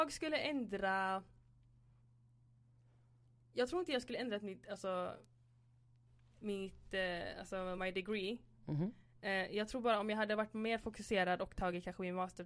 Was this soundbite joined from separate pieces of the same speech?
no; 0 cuts

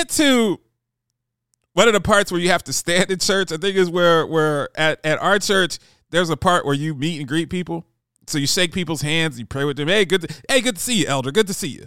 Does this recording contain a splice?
no; 0 cuts

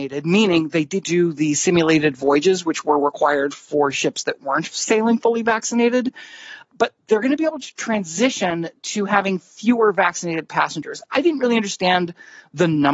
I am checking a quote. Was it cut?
yes; 1 cut; at 1.0 s

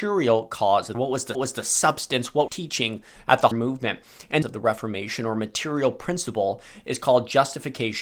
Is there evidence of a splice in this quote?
yes; 6 cuts; at 0.9 s, 1.3 s, 2.5 s, 3.2 s, 3.5 s, 4.4 s

